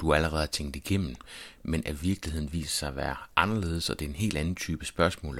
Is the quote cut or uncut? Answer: uncut